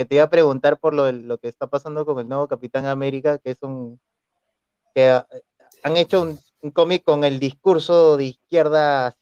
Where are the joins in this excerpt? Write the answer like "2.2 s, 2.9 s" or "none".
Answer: none